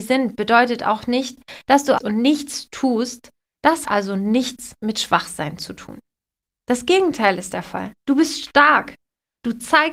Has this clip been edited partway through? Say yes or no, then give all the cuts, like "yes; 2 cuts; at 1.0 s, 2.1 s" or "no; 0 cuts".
yes; 3 cuts; at 2.0 s, 3.8 s, 8.0 s